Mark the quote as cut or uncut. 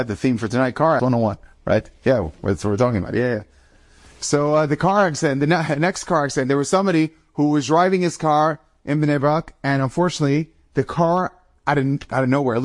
cut